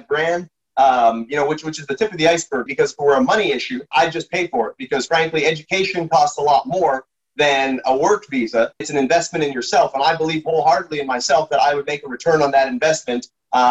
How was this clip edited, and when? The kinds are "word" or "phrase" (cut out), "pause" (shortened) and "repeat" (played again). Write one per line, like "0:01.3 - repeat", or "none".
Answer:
0:02.7 - word
0:03.9 - word
0:05.1 - word
0:08.8 - word